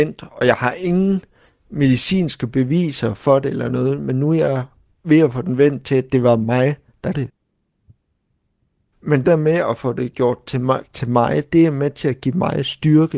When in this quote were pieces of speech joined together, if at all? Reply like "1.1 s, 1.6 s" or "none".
7.1 s, 9.2 s